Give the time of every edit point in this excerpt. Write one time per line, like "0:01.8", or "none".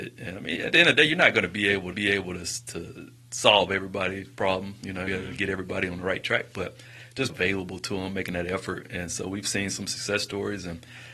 0:01.9
0:05.1
0:07.3